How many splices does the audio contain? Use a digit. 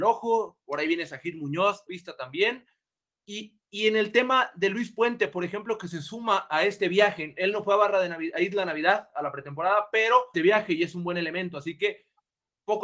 2